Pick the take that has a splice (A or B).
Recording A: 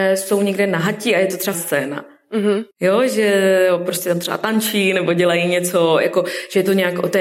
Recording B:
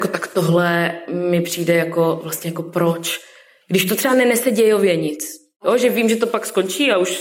A